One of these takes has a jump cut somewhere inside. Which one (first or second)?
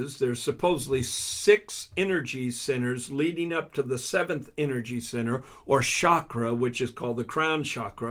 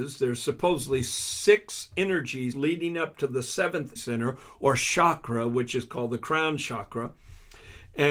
second